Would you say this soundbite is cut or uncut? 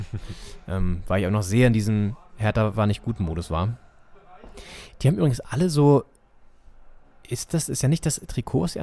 uncut